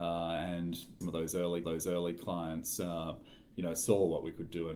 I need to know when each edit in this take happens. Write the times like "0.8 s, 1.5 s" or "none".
1.0 s, 1.6 s